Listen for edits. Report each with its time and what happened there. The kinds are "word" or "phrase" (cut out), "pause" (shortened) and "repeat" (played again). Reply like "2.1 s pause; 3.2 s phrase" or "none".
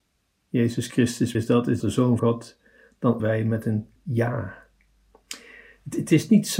1.3 s word; 1.8 s word; 2.2 s word; 3.2 s word; 4.0 s word